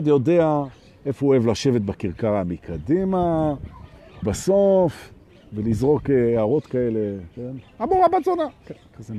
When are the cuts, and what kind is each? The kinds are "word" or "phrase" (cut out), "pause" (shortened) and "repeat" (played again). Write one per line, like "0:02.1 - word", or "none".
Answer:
0:04.2 - word